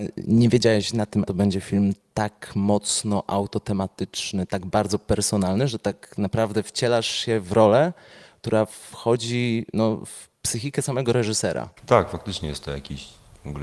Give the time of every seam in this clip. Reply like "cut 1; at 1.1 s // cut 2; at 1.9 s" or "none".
cut 1; at 1.3 s // cut 2; at 10.3 s // cut 3; at 11.8 s

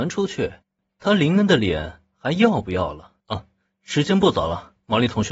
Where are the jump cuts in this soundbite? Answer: cut 1; at 3.2 s

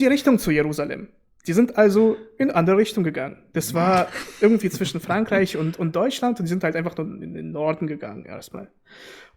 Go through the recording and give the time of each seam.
none

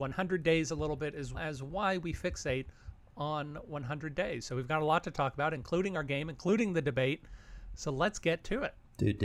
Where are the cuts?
cut 1; at 1.3 s

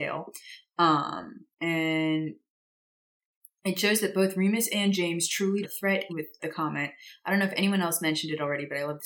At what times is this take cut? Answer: cut 1; at 1.5 s // cut 2; at 5.6 s // cut 3; at 6.1 s // cut 4; at 6.4 s

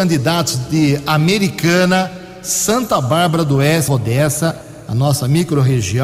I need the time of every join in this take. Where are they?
cut 1; at 3.9 s

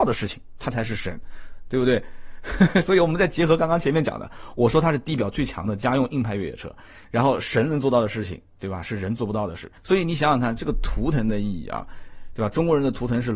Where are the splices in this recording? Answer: cut 1; at 7.0 s // cut 2; at 9.8 s

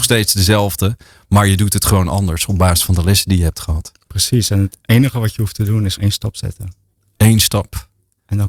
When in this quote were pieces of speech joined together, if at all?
cut 1; at 6.0 s

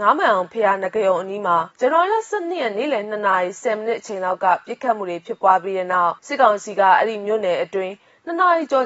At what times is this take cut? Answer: cut 1; at 1.7 s // cut 2; at 6.2 s

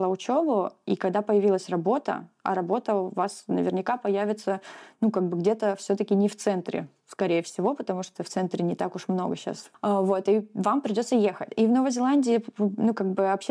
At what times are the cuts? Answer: none

